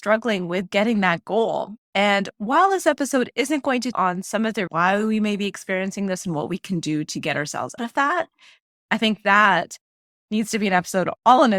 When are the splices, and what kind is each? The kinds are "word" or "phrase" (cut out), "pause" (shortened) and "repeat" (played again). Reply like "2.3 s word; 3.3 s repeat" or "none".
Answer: 3.9 s word; 4.7 s word; 7.8 s word